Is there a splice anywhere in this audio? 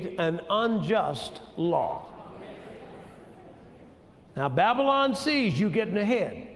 no; 0 cuts

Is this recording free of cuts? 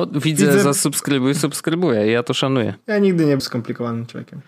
no; 2 cuts; at 2.8 s, 3.4 s

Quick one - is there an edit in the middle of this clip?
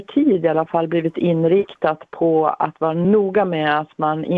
no; 0 cuts

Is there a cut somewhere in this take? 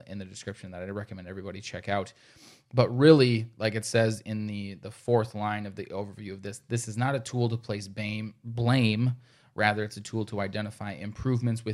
no; 0 cuts

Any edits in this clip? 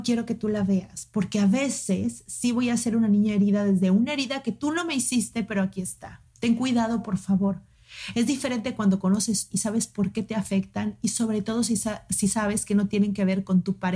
yes; 1 cut; at 9.5 s

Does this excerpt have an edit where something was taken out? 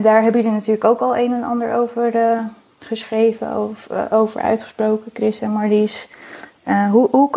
no; 0 cuts

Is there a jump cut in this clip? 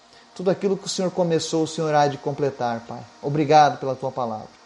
no; 0 cuts

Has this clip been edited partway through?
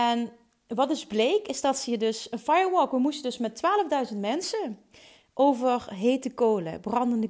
no; 0 cuts

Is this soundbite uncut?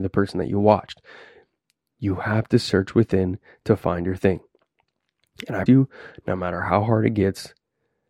no; 1 cut; at 5.7 s

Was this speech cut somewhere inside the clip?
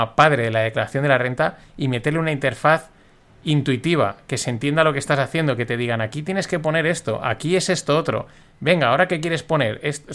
no; 0 cuts

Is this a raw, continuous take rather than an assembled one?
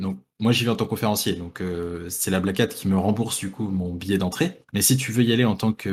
no; 1 cut; at 4.7 s

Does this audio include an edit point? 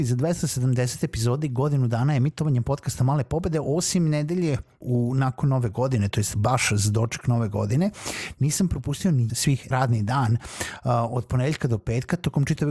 yes; 3 cuts; at 4.8 s, 9.3 s, 9.7 s

